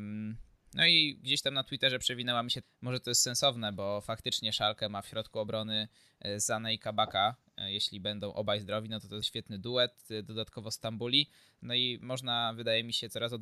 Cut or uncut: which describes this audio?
cut